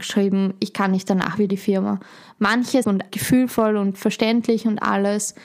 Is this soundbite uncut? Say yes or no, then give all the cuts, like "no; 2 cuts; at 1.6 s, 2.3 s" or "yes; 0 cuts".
no; 2 cuts; at 1.5 s, 2.8 s